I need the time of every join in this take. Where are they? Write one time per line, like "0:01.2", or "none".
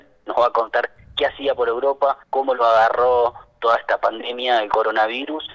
0:02.2